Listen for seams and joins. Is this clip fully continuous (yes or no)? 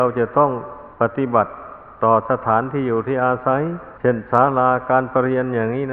no